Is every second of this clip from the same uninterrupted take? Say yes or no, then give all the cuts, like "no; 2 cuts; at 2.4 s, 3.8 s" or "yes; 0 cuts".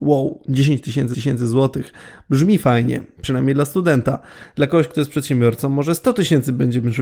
no; 1 cut; at 1.1 s